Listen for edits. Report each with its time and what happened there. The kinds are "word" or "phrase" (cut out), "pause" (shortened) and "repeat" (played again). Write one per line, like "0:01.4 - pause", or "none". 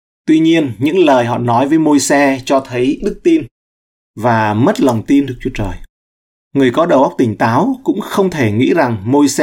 0:03.0 - word
0:05.3 - word